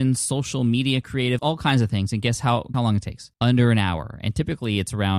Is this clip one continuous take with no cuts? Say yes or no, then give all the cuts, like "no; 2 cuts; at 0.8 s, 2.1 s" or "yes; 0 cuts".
no; 3 cuts; at 1.4 s, 2.7 s, 3.3 s